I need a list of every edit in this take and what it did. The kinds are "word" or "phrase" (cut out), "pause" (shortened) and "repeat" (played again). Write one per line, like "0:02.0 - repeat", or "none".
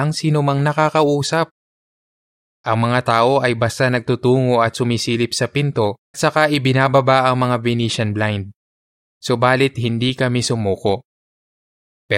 0:06.1 - word